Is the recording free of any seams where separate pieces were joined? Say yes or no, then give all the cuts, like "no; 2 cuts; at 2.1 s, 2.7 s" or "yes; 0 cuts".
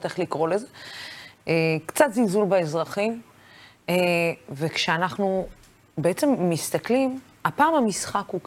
yes; 0 cuts